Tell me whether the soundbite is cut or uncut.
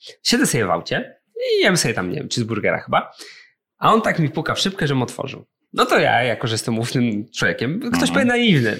uncut